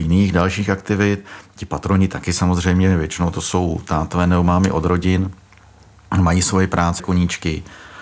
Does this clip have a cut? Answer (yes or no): yes